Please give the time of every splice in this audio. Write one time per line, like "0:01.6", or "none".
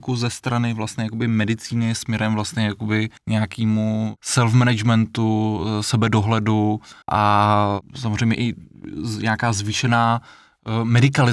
0:03.2
0:07.0